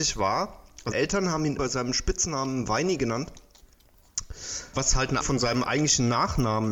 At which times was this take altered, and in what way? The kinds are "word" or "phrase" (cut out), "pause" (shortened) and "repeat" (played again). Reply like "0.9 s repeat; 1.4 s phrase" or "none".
0.9 s word; 1.6 s word; 4.7 s word; 5.2 s word